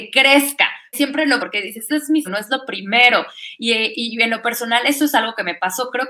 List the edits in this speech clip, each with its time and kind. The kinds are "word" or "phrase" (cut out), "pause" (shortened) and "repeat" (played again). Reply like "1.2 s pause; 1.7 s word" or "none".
0.9 s word; 1.4 s phrase; 1.9 s word; 2.2 s word

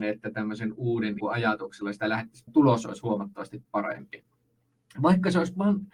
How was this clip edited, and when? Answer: 1.2 s phrase; 2.5 s phrase

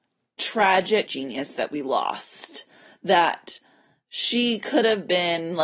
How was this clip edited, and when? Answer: 1.1 s word

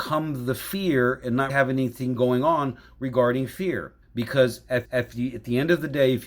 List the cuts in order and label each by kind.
1.5 s word; 4.0 s pause; 4.8 s repeat

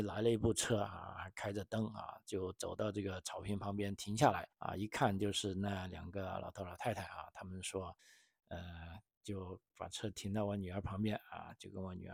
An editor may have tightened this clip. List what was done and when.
4.5 s pause; 8.0 s pause

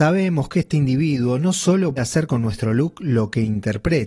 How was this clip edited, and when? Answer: 2.0 s word

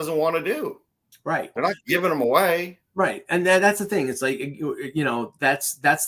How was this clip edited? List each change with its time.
1.6 s word

